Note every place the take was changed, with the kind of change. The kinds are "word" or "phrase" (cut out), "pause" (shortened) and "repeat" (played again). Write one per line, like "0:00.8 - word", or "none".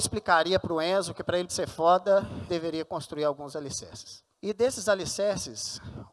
0:01.5 - word
0:02.5 - word
0:04.3 - pause